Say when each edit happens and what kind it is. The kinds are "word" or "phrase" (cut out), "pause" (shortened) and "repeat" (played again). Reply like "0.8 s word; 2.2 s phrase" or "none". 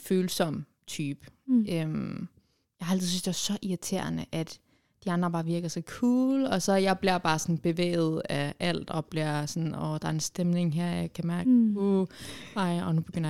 none